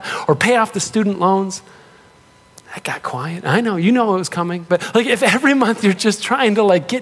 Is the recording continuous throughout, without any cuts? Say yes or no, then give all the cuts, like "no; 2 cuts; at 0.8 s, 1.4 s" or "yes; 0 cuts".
yes; 0 cuts